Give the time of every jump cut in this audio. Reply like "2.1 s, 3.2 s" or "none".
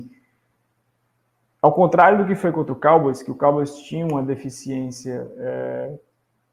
none